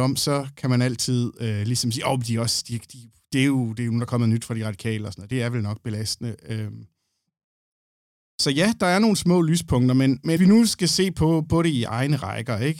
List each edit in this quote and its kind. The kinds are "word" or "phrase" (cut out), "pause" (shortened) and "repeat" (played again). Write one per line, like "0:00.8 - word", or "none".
0:10.4 - word